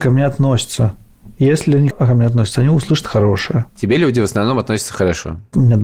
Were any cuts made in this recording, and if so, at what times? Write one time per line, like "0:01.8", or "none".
0:01.9